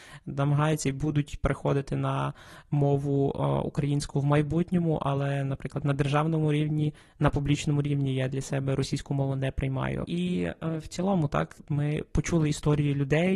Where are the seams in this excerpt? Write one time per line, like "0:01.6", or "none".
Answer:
0:10.0